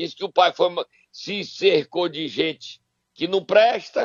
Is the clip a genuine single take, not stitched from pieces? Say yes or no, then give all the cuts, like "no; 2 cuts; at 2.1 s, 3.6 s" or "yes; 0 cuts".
yes; 0 cuts